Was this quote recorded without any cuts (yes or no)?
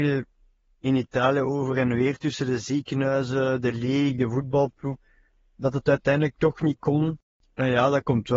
yes